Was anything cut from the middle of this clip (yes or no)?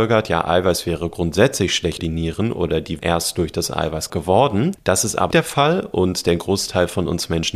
yes